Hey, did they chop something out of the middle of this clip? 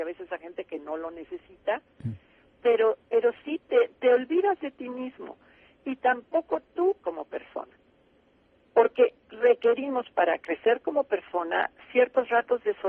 yes; 1 cut; at 7.0 s

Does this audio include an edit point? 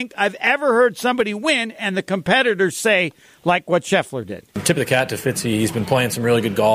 no; 0 cuts

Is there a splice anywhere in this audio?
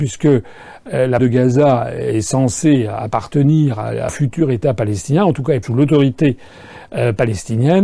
yes; 3 cuts; at 1.2 s, 4.1 s, 5.6 s

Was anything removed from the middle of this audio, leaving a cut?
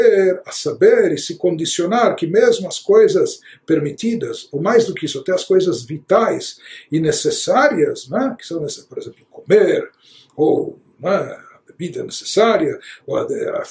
no; 0 cuts

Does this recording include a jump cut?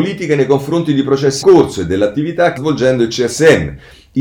yes; 2 cuts; at 1.4 s, 2.6 s

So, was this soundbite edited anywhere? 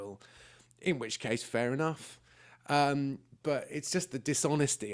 no; 0 cuts

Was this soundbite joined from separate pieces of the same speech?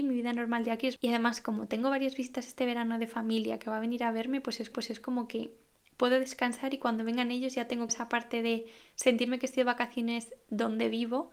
yes; 2 cuts; at 4.7 s, 7.9 s

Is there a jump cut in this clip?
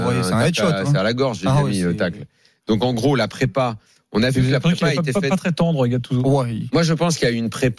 no; 0 cuts

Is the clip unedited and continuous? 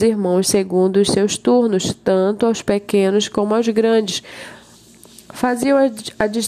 yes; 0 cuts

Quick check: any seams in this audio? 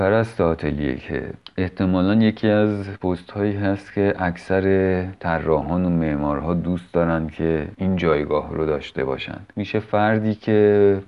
no; 0 cuts

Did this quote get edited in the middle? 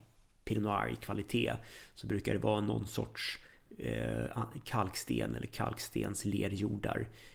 no; 0 cuts

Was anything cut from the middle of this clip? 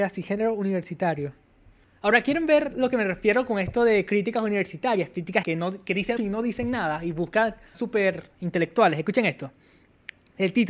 yes; 3 cuts; at 5.4 s, 6.2 s, 7.7 s

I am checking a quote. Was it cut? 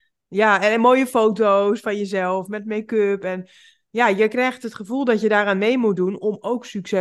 no; 0 cuts

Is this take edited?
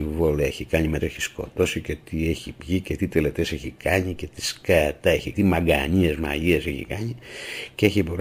yes; 2 cuts; at 1.0 s, 5.3 s

